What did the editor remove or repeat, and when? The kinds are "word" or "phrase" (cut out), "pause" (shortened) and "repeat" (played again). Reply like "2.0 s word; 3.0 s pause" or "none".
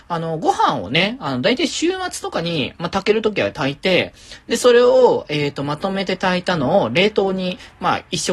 none